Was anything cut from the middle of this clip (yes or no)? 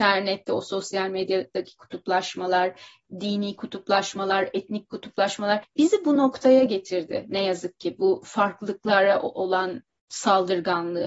no